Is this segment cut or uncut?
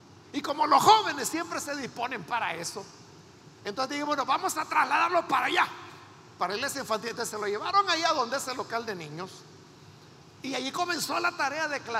uncut